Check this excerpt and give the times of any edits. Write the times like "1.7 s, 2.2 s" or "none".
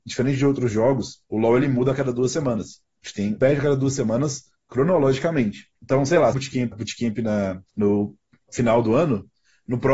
1.3 s, 3.4 s, 5.8 s, 6.3 s, 6.7 s, 7.7 s